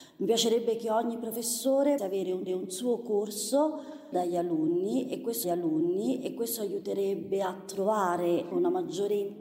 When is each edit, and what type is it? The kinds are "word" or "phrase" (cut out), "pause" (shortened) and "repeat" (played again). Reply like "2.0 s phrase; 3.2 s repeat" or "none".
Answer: 2.0 s word; 2.5 s repeat; 4.1 s word; 5.4 s repeat; 8.5 s phrase